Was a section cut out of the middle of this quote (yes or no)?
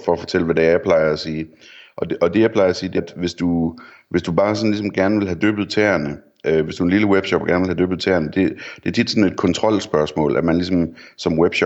yes